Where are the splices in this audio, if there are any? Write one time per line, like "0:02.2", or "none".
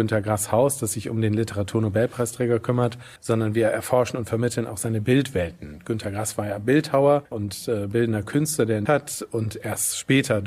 0:03.2
0:07.3
0:08.9